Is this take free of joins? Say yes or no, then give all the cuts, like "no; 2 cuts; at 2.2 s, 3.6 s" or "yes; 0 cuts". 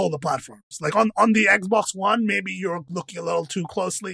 yes; 0 cuts